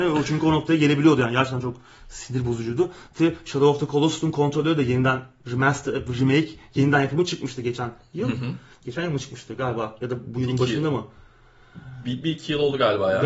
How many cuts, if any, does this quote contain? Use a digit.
1